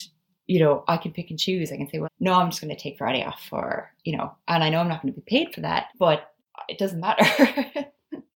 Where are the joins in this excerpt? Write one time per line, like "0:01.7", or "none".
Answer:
0:02.0
0:04.0